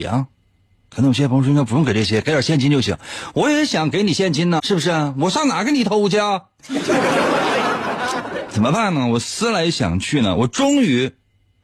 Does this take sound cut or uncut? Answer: cut